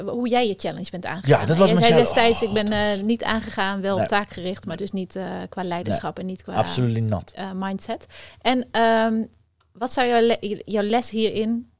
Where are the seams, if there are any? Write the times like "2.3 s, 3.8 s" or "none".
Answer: none